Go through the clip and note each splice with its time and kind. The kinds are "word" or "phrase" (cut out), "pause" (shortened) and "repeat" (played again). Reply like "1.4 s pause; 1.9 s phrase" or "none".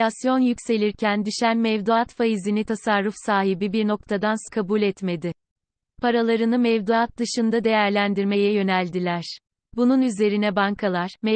4.5 s word